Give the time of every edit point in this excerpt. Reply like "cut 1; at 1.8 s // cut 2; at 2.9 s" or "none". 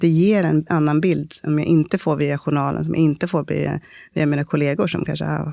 none